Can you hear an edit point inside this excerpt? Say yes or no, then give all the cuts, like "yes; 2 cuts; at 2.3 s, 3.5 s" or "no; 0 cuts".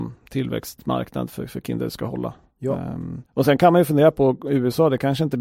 yes; 1 cut; at 3.3 s